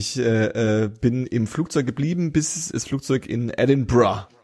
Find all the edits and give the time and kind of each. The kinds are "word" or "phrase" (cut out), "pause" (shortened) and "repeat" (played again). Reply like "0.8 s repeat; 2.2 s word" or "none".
none